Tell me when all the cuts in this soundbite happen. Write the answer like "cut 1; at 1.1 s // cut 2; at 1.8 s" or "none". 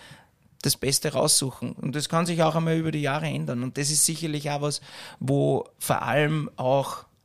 none